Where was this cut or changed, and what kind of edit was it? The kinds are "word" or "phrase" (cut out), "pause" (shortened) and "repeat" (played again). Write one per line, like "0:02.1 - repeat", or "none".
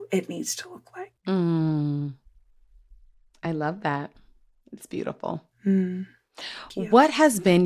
none